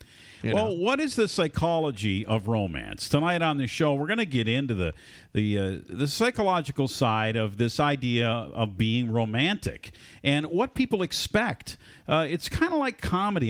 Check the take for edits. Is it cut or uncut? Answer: uncut